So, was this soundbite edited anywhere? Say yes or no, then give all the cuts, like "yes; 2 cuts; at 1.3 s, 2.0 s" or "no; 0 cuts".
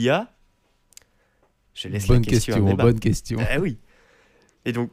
no; 0 cuts